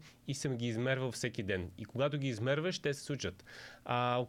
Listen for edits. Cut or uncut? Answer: uncut